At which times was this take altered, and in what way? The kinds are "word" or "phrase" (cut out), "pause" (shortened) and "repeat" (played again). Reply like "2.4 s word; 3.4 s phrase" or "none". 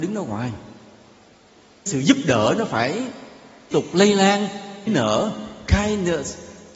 1.9 s word; 3.7 s word; 4.9 s word

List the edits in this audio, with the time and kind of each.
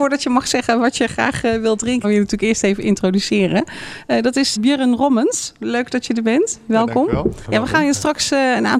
2.0 s word; 4.6 s word; 7.4 s word

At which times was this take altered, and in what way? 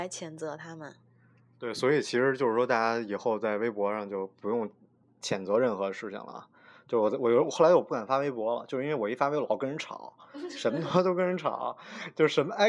none

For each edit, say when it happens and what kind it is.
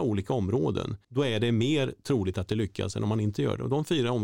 1.0 s pause

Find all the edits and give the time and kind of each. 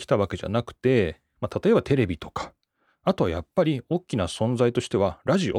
none

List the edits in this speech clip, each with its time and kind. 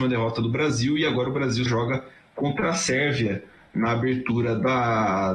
1.7 s word

